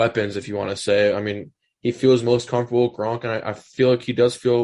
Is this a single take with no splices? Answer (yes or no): yes